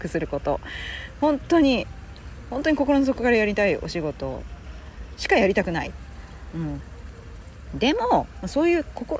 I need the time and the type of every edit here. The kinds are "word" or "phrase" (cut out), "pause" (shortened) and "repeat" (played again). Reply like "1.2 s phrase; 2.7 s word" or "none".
none